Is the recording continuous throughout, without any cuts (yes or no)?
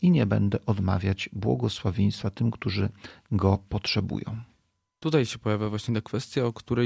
yes